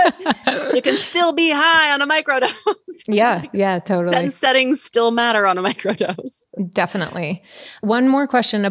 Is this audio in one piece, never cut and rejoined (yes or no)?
yes